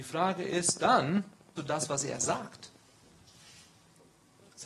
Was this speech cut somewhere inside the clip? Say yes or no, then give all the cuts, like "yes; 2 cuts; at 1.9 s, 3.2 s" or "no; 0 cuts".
yes; 1 cut; at 1.6 s